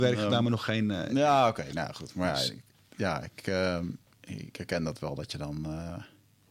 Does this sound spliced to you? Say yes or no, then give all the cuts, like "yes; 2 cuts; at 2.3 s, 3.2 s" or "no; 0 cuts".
no; 0 cuts